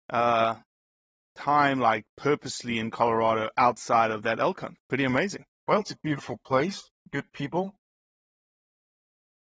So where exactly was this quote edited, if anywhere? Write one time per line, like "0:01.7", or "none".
0:04.8
0:05.5
0:07.0